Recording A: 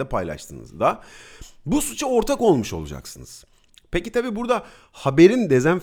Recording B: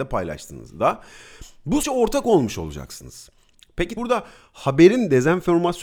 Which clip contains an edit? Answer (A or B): B